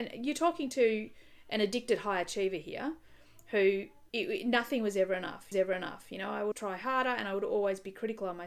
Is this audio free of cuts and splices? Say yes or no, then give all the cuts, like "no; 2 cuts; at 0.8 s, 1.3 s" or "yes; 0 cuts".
no; 3 cuts; at 4.1 s, 5.5 s, 6.5 s